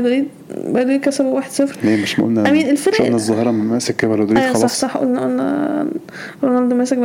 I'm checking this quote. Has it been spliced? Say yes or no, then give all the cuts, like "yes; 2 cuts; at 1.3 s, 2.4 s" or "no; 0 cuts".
no; 0 cuts